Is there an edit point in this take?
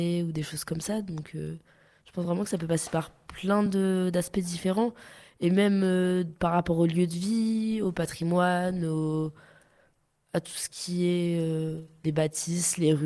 no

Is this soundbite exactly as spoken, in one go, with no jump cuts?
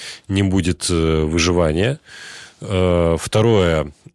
yes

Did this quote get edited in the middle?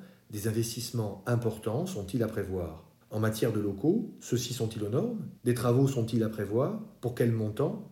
yes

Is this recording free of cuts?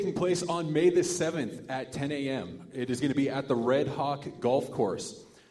yes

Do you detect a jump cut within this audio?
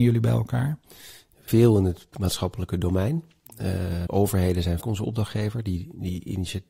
yes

